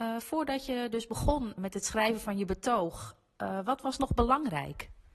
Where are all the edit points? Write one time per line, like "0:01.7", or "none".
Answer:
0:01.6